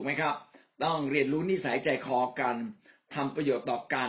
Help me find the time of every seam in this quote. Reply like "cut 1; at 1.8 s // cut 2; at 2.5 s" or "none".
none